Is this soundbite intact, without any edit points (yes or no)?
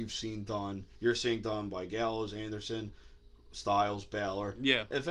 yes